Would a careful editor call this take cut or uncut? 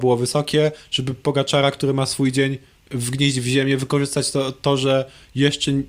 uncut